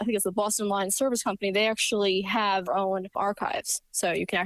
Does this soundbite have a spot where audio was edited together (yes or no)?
yes